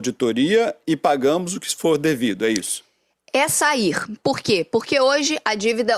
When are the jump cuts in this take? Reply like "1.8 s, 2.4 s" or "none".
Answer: none